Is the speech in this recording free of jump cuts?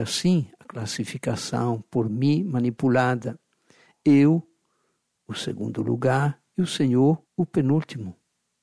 no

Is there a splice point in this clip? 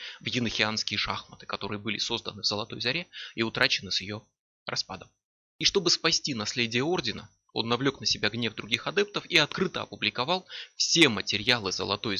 no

